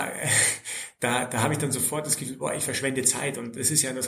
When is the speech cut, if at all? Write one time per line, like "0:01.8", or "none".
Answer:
none